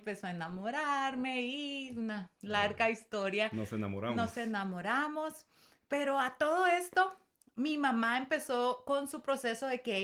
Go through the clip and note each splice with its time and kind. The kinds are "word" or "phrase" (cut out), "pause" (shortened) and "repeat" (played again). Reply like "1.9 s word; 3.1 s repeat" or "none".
none